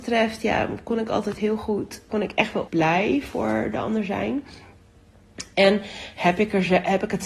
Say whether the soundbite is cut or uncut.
cut